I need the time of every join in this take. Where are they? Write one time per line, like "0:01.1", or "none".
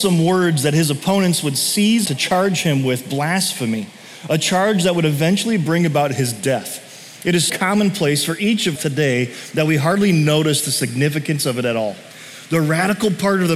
0:02.1
0:07.5
0:08.8